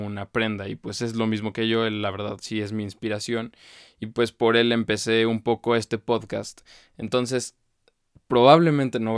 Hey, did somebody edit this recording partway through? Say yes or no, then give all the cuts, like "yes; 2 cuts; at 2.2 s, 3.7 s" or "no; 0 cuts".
no; 0 cuts